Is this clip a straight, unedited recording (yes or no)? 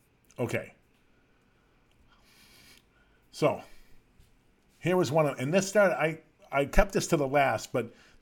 yes